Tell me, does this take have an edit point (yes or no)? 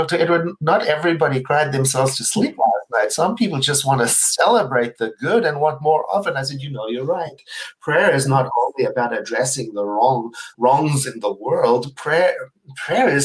yes